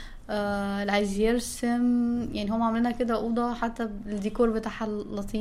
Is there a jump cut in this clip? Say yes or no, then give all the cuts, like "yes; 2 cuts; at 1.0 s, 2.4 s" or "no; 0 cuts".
no; 0 cuts